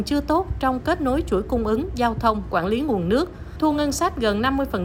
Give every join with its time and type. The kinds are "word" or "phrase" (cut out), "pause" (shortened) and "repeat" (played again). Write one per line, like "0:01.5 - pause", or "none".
none